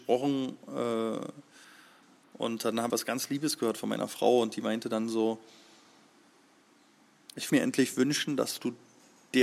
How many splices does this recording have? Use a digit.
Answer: 2